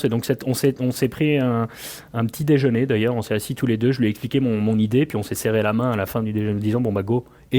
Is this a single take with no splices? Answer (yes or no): yes